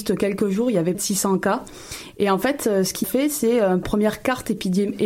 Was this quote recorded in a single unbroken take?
no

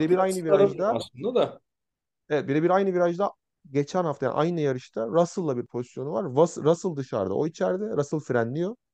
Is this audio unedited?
yes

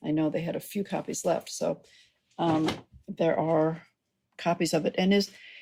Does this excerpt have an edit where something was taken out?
no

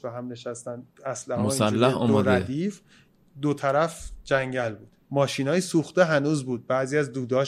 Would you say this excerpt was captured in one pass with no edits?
no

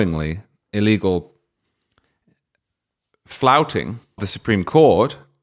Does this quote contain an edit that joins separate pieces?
yes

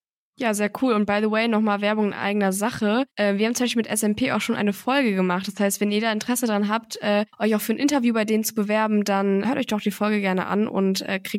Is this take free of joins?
no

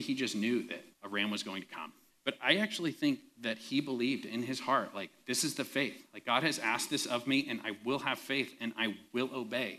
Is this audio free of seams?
no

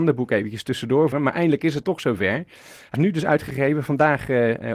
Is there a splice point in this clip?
yes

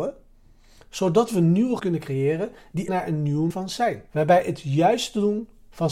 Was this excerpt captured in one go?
no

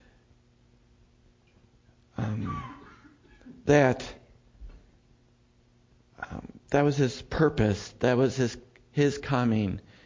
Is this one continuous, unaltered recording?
yes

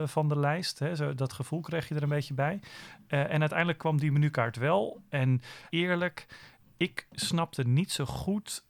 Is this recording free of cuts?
no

